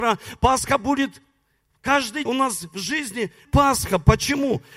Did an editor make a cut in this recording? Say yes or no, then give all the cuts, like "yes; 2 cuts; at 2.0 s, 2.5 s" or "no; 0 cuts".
yes; 2 cuts; at 2.3 s, 3.4 s